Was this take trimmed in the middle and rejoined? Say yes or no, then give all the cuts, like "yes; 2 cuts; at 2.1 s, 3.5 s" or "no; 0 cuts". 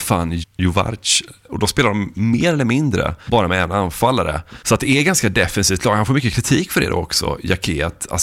no; 0 cuts